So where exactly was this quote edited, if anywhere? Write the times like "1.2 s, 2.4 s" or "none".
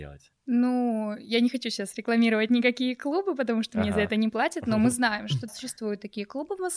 5.5 s

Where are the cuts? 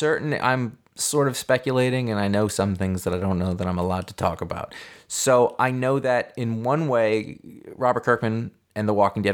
none

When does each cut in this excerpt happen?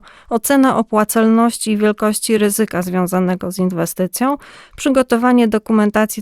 none

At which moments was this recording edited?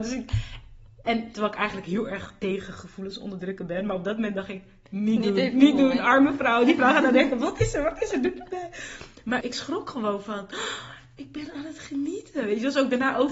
9.4 s

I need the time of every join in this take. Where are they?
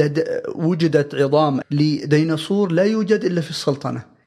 1.6 s

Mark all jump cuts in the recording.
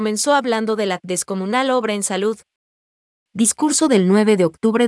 none

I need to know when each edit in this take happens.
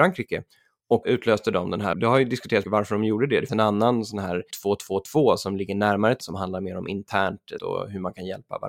1.0 s, 1.9 s, 2.6 s, 3.5 s, 4.5 s, 6.2 s, 7.6 s

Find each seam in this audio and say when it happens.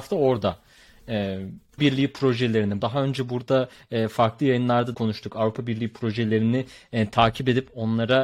1.8 s, 2.8 s, 4.9 s

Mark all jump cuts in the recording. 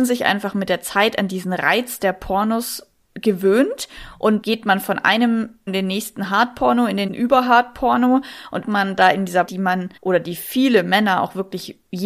3.0 s, 4.4 s, 5.7 s, 7.1 s, 8.6 s, 9.5 s, 10.0 s

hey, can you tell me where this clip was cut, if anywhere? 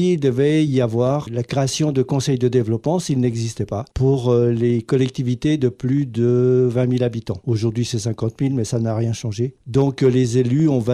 none

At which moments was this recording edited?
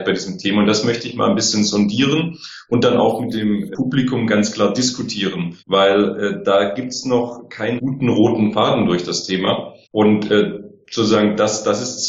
5.6 s, 7.8 s, 9.8 s

